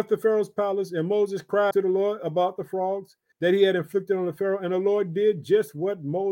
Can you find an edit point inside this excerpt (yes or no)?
yes